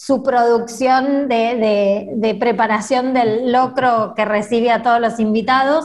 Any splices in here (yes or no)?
no